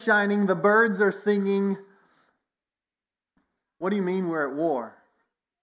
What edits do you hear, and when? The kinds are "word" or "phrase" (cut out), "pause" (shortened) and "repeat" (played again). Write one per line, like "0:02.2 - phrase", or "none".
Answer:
none